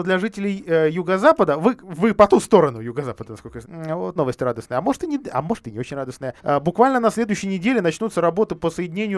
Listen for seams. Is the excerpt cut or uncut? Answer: cut